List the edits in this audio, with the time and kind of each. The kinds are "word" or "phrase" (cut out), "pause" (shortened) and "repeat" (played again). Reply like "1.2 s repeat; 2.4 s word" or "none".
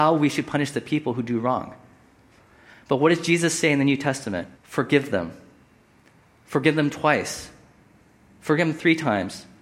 4.6 s pause